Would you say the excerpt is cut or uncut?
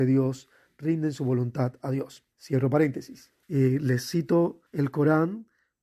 cut